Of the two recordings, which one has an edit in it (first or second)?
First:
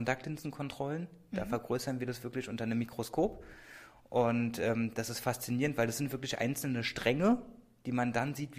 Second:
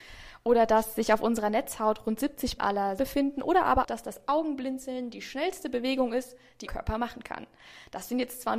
second